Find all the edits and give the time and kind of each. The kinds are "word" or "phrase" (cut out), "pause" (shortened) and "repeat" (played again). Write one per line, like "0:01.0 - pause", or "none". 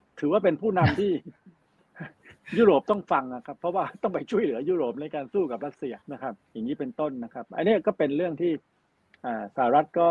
0:06.0 - pause
0:06.4 - pause